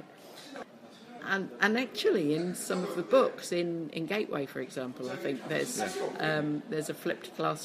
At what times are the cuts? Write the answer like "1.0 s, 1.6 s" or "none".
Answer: 1.2 s